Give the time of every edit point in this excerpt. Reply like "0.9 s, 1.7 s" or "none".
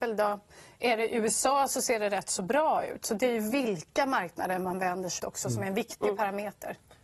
5.2 s